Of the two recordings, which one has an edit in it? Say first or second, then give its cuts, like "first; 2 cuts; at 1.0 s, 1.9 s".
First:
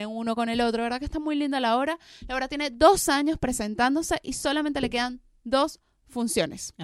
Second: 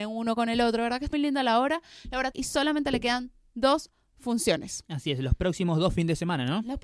second; 2 cuts; at 1.1 s, 2.3 s